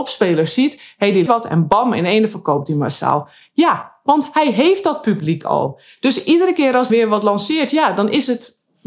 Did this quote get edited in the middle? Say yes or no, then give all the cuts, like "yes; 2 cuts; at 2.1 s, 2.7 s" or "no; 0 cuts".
yes; 2 cuts; at 1.3 s, 6.9 s